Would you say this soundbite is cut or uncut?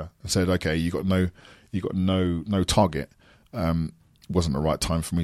uncut